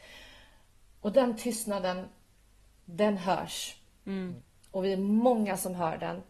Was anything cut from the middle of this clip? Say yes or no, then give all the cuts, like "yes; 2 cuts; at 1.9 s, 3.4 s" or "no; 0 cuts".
no; 0 cuts